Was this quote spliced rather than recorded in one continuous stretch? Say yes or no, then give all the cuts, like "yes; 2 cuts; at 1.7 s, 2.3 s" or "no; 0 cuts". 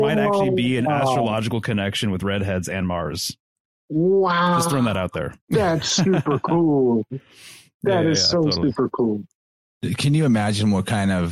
yes; 1 cut; at 5.4 s